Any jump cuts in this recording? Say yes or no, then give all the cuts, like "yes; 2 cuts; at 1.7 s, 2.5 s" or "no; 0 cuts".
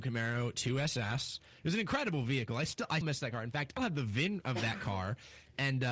yes; 2 cuts; at 3.0 s, 3.8 s